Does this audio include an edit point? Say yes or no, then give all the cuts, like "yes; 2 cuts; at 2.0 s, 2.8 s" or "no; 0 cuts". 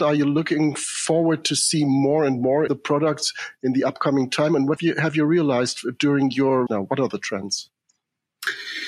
yes; 3 cuts; at 2.7 s, 4.8 s, 6.7 s